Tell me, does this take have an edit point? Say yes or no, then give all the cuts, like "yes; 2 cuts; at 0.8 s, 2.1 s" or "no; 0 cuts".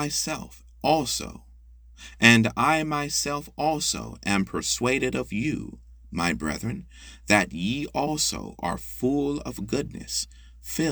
no; 0 cuts